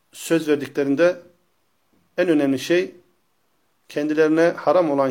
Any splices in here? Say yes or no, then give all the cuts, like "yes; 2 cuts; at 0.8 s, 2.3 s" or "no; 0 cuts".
no; 0 cuts